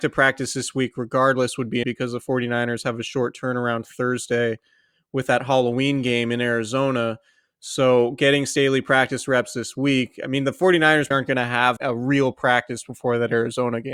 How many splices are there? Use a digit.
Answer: 3